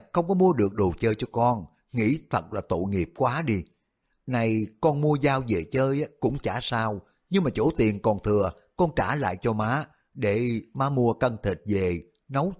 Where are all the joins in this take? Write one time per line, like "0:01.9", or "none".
none